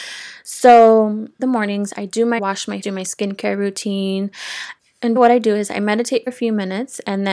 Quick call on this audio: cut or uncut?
cut